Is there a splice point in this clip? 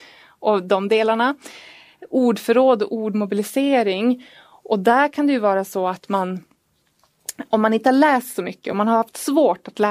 no; 0 cuts

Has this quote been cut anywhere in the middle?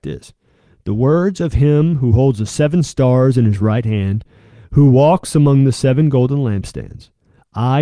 no; 0 cuts

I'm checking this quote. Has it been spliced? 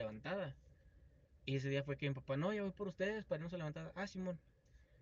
no; 0 cuts

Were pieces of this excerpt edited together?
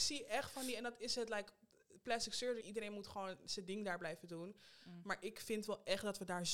yes; 1 cut; at 2.6 s

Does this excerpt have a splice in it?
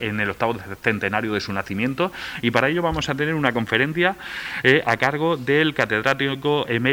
no; 0 cuts

